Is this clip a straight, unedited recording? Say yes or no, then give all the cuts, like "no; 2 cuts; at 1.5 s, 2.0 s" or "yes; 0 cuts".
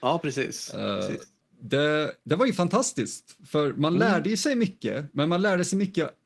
yes; 0 cuts